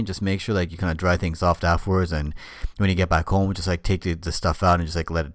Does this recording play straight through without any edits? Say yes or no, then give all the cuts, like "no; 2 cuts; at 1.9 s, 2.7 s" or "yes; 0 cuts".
yes; 0 cuts